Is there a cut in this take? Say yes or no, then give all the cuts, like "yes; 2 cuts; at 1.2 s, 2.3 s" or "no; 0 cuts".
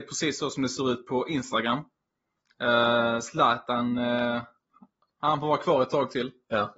no; 0 cuts